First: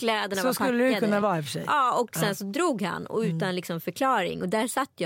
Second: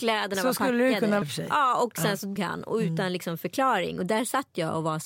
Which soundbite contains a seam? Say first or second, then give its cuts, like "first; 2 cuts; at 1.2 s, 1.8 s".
second; 2 cuts; at 1.2 s, 2.4 s